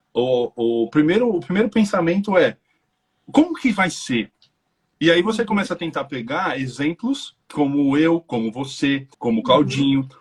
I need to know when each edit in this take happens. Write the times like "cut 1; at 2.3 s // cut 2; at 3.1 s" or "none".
cut 1; at 7.4 s // cut 2; at 9.1 s